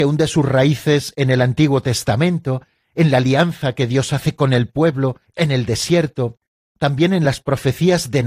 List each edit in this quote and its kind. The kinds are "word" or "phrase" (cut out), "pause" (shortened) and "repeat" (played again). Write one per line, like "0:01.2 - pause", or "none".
none